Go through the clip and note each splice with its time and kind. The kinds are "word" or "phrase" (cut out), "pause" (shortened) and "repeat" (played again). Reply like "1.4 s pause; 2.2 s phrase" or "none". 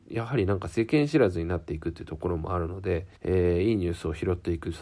3.2 s pause